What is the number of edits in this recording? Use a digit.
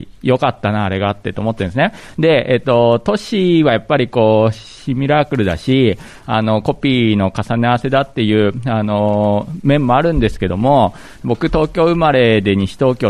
0